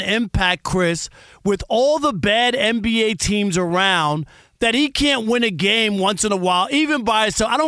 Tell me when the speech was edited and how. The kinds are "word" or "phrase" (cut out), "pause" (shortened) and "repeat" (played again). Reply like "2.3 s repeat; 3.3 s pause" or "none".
none

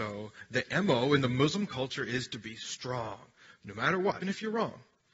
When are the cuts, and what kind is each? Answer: 4.2 s word

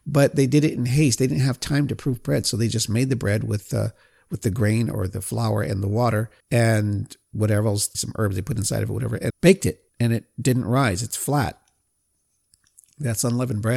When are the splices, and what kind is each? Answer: 6.4 s pause; 7.9 s word; 9.3 s phrase; 9.9 s pause

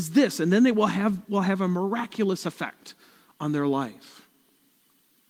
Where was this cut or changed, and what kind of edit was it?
1.3 s word

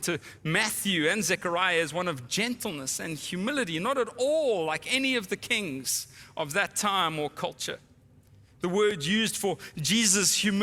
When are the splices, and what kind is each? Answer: none

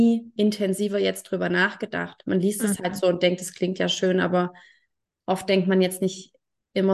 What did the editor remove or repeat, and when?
none

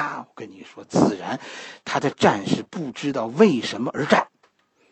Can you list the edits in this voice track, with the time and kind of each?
none

